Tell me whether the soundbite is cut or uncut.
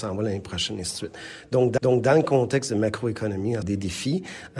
cut